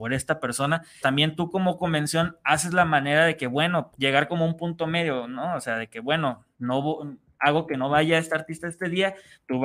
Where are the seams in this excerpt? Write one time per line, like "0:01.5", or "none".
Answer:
0:01.0
0:03.9
0:06.5